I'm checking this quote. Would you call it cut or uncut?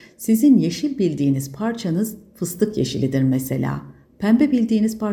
uncut